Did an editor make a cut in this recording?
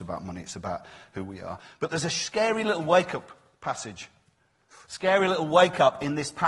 yes; 1 cut; at 4.8 s

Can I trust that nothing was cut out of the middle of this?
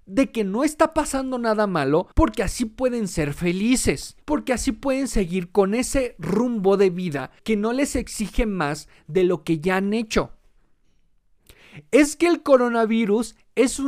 no; 3 cuts; at 2.1 s, 4.2 s, 7.4 s

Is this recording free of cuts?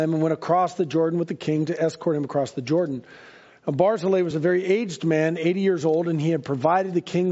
yes; 0 cuts

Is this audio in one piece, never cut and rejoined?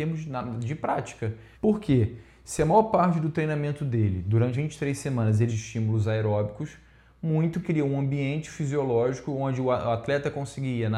no; 4 cuts; at 1.5 s, 4.5 s, 5.5 s, 7.6 s

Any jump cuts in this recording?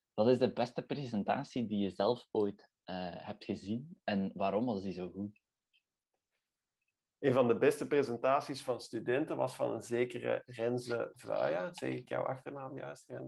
no; 0 cuts

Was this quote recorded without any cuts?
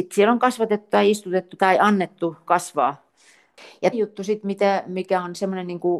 no; 3 cuts; at 1.6 s, 2.5 s, 3.9 s

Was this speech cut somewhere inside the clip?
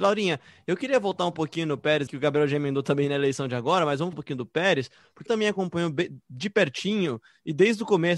yes; 3 cuts; at 2.1 s, 4.1 s, 5.3 s

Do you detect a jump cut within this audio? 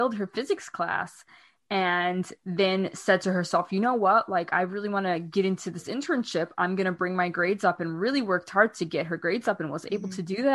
no; 0 cuts

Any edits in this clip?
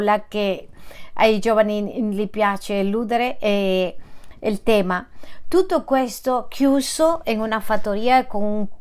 no; 0 cuts

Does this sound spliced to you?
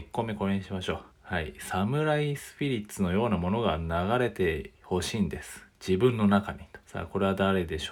yes; 3 cuts; at 1.1 s, 4.7 s, 6.8 s

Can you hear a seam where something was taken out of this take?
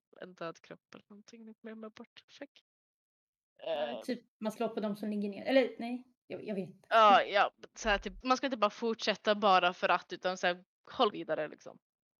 yes; 3 cuts; at 4.6 s, 8.2 s, 11.1 s

